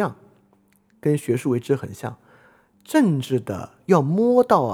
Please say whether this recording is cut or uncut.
uncut